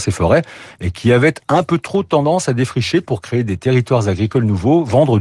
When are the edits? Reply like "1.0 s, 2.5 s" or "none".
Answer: none